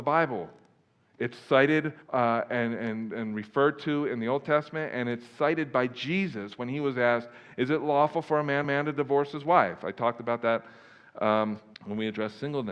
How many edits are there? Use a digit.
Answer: 3